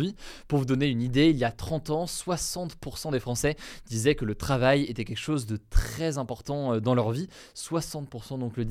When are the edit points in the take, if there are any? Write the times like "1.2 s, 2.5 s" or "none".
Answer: none